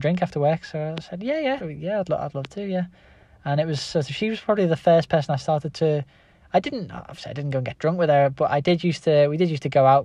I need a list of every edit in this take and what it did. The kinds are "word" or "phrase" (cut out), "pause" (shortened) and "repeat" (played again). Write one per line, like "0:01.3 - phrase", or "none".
0:01.6 - word